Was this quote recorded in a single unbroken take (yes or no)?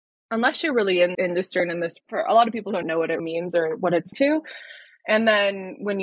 no